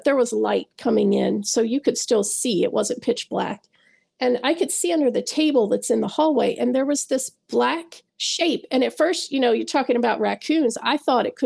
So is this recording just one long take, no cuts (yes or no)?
no